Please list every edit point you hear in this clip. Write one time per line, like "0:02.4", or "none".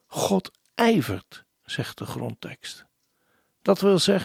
none